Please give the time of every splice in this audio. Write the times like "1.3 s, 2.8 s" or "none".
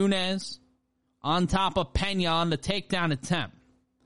none